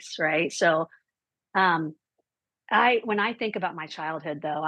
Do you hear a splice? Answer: no; 0 cuts

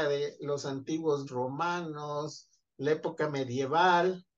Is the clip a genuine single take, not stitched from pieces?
no; 1 cut; at 1.3 s

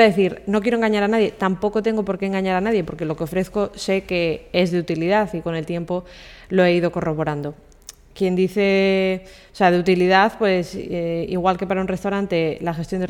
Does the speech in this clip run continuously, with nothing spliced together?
yes; 0 cuts

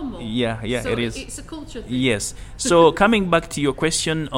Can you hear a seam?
no; 0 cuts

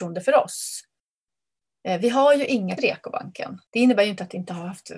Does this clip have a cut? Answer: yes; 2 cuts; at 2.8 s, 3.7 s

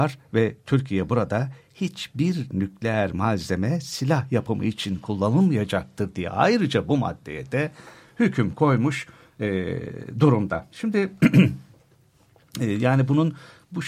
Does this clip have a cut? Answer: no; 0 cuts

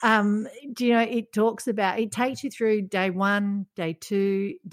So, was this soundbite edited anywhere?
no; 0 cuts

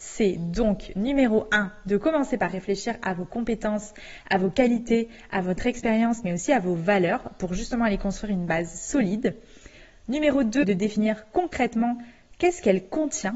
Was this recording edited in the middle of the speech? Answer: no; 0 cuts

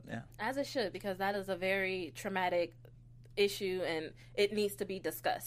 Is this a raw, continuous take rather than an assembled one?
yes; 0 cuts

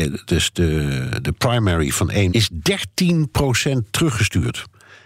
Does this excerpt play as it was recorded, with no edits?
no; 1 cut; at 2.3 s

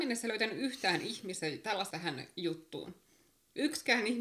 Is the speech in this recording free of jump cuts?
no; 1 cut; at 1.9 s

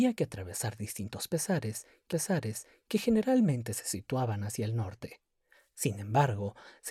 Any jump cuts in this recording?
yes; 1 cut; at 2.1 s

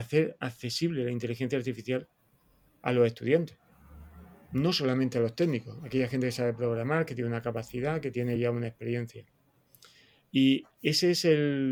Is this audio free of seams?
yes; 0 cuts

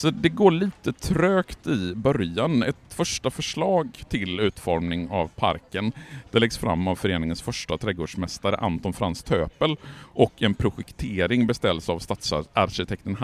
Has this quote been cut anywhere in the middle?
no; 0 cuts

